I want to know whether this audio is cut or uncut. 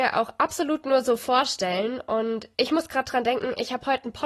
cut